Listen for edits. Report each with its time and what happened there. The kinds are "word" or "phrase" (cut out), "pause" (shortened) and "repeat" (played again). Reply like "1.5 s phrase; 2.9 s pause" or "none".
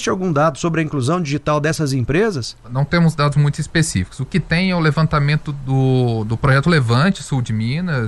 2.6 s pause